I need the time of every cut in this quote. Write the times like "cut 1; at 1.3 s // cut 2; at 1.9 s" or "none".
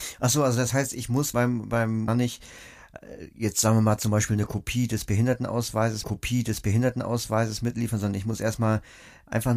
cut 1; at 1.3 s // cut 2; at 2.1 s // cut 3; at 6.0 s